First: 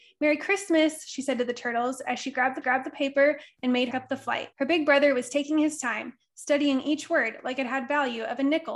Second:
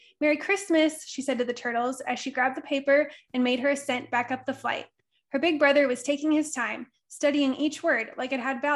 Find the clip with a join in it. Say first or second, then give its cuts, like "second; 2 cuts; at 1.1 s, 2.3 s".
first; 3 cuts; at 2.6 s, 3.9 s, 4.5 s